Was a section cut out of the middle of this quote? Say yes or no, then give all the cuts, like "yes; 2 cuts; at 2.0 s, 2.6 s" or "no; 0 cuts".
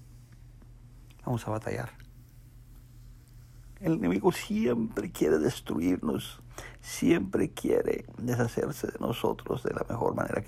no; 0 cuts